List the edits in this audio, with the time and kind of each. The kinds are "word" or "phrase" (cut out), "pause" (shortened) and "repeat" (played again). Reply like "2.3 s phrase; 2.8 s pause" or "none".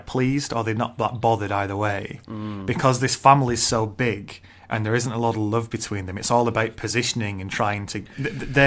none